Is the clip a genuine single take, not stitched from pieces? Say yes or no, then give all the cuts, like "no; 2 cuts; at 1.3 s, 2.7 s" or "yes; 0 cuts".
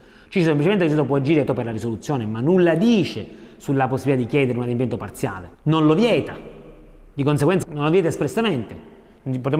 no; 3 cuts; at 1.5 s, 5.5 s, 7.6 s